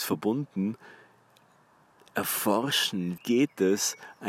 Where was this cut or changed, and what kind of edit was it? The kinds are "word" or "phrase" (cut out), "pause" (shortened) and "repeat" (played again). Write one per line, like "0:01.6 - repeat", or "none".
0:03.2 - word